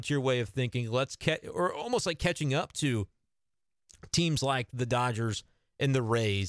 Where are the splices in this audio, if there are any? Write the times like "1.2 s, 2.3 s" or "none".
none